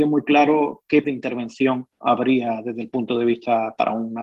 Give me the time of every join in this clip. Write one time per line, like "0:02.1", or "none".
0:01.0